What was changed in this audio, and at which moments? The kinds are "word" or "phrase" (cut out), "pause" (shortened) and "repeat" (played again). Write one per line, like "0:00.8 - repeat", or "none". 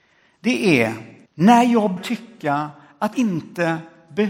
0:01.3 - pause
0:02.0 - word
0:03.1 - word